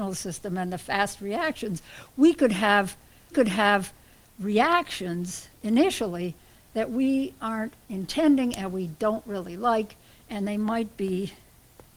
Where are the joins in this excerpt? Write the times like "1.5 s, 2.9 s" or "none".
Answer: 3.3 s